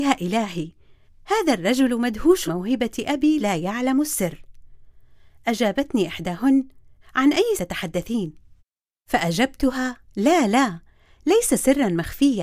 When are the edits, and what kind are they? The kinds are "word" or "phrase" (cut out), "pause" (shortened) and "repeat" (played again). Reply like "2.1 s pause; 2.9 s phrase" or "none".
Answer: 2.5 s word; 3.4 s word; 7.0 s word; 7.6 s word; 10.1 s pause